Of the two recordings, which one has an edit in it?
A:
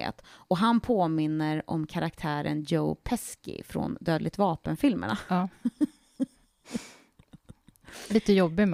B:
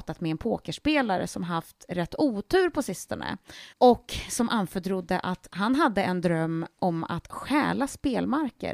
B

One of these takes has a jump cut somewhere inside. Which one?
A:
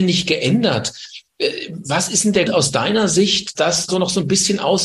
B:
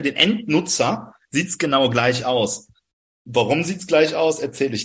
A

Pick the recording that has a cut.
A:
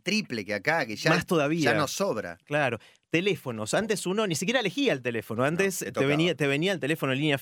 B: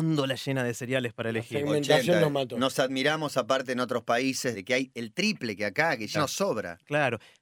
B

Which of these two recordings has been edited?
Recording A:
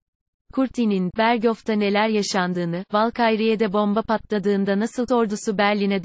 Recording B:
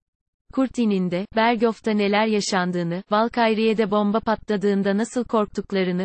A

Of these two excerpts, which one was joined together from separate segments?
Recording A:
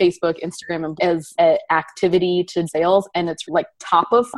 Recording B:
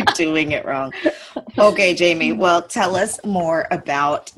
A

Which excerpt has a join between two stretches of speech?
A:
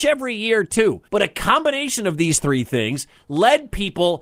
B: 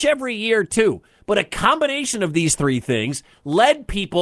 A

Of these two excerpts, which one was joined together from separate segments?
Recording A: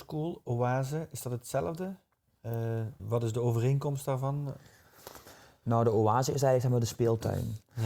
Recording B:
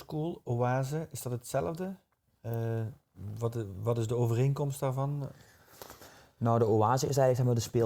A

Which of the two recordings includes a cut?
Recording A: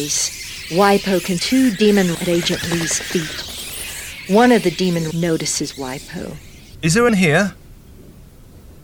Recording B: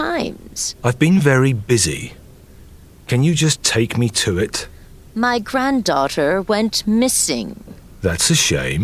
A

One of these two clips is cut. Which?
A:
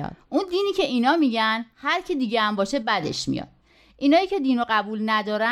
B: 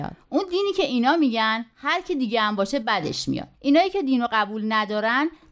B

